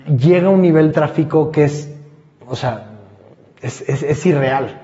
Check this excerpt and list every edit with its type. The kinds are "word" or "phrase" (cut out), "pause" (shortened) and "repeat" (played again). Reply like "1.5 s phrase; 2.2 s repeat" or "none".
0.9 s word